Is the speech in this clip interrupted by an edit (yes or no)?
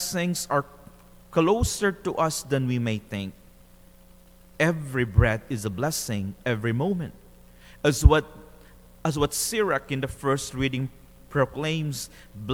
no